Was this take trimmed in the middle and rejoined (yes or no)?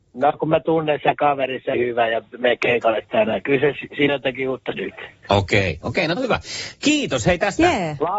yes